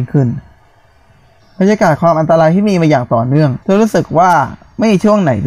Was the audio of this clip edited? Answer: yes; 1 cut; at 3.6 s

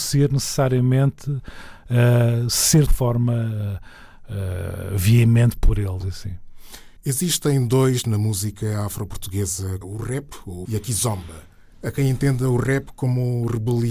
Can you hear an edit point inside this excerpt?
yes; 6 cuts; at 2.9 s, 6.0 s, 7.0 s, 8.0 s, 9.8 s, 10.7 s

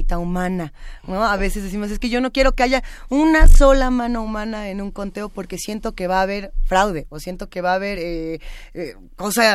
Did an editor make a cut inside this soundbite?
no; 0 cuts

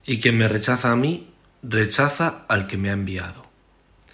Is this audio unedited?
yes; 0 cuts

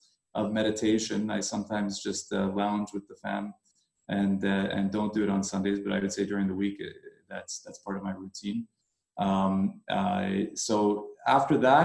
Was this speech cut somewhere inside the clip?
no; 0 cuts

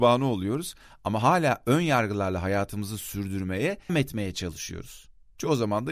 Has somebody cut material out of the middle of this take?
yes; 1 cut; at 3.9 s

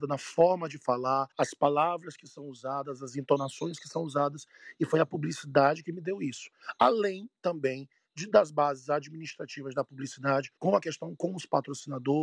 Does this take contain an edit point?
yes; 2 cuts; at 1.3 s, 10.6 s

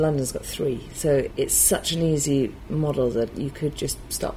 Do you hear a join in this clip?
no; 0 cuts

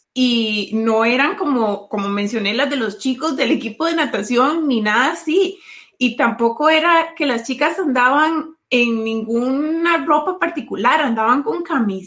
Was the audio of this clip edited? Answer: no; 0 cuts

